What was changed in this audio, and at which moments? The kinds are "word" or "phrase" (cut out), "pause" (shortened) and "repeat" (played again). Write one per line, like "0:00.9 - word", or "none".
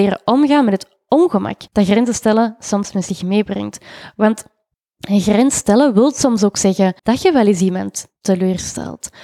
0:01.7 - pause
0:04.7 - pause
0:07.0 - pause